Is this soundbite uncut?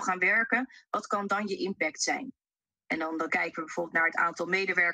yes; 0 cuts

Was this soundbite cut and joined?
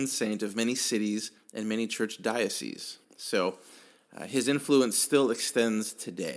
yes; 2 cuts; at 1.4 s, 3.0 s

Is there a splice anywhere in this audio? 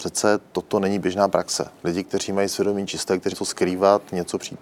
yes; 1 cut; at 3.3 s

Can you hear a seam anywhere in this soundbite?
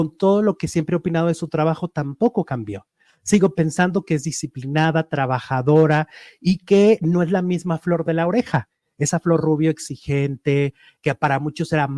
no; 0 cuts

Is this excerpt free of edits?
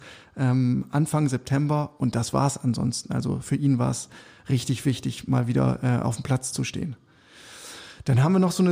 yes; 0 cuts

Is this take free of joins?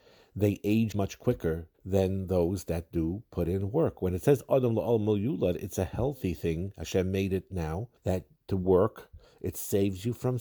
no; 3 cuts; at 0.9 s, 1.7 s, 8.0 s

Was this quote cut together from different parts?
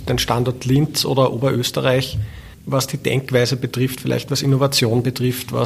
no; 0 cuts

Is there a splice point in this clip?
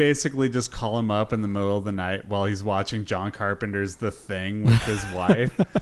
no; 0 cuts

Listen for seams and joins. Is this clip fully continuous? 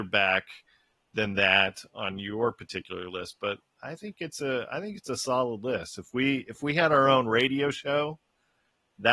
yes; 0 cuts

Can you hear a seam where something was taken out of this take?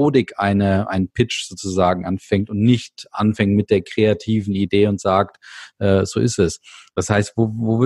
no; 0 cuts

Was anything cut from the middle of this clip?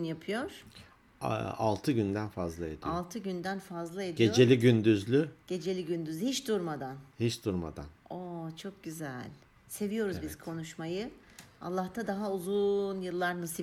yes; 3 cuts; at 7.1 s, 8.0 s, 9.6 s

